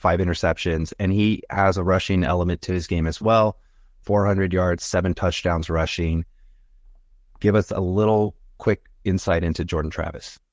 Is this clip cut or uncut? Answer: uncut